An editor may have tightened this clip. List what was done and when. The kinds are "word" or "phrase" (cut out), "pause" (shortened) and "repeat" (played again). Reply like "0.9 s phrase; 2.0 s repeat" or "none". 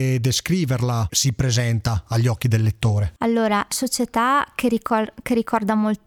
1.1 s word; 3.7 s word